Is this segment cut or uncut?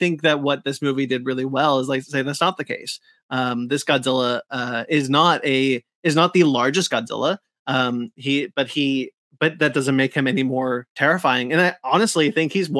uncut